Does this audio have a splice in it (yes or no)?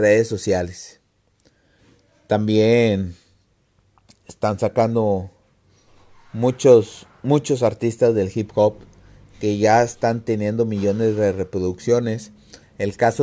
no